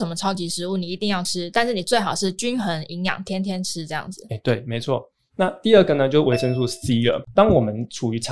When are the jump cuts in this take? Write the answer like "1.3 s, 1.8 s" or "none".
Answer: none